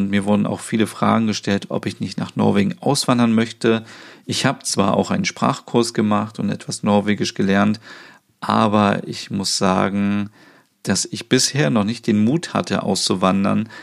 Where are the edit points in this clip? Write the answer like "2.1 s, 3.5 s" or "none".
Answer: none